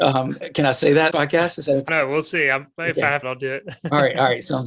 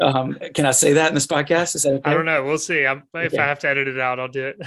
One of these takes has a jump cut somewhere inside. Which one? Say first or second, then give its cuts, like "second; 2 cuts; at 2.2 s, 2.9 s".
first; 3 cuts; at 1.1 s, 1.9 s, 3.2 s